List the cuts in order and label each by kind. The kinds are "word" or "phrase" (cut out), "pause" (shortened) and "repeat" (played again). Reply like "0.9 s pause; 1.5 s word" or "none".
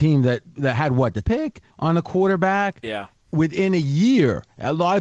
1.2 s word; 1.7 s pause